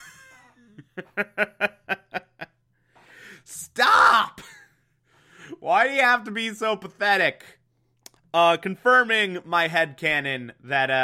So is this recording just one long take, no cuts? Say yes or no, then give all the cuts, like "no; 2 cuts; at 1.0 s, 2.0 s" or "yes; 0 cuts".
yes; 0 cuts